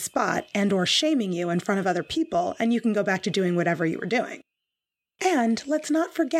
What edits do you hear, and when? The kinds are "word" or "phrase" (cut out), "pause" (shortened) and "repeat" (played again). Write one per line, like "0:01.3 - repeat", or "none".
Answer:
none